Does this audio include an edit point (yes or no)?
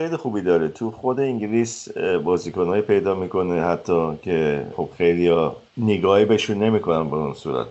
no